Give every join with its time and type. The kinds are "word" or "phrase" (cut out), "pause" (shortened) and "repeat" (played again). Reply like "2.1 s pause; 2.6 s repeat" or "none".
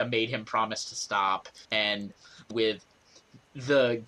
1.6 s pause; 2.5 s phrase